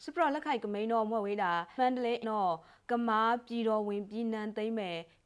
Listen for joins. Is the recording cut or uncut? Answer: cut